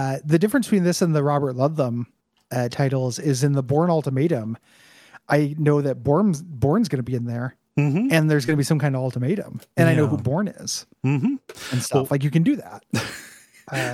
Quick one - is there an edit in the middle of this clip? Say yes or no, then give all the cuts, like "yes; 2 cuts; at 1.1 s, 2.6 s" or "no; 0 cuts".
no; 0 cuts